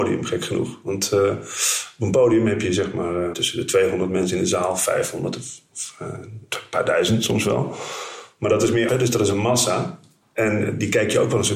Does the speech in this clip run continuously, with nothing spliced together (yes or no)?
no